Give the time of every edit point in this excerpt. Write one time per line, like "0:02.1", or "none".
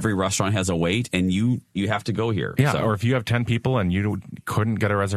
none